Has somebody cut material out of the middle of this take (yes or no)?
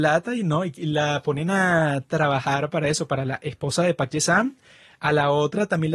no